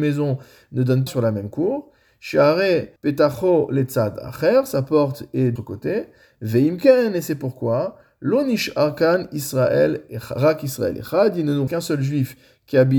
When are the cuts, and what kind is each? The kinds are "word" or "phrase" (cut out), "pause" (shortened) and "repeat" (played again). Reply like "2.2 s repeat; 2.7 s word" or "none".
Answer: 1.1 s word; 3.0 s pause; 5.6 s word; 11.7 s word